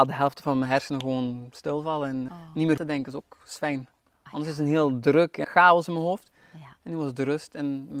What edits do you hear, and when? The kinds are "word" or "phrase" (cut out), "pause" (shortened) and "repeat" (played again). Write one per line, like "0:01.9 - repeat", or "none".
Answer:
0:02.3 - word
0:02.8 - phrase
0:05.4 - word